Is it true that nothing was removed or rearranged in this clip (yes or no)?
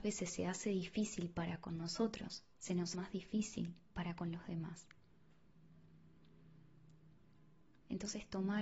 no